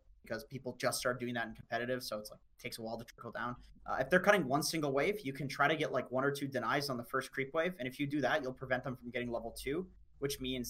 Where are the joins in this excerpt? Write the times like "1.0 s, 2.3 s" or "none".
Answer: 3.8 s